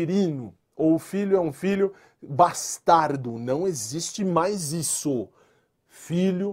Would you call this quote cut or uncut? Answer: uncut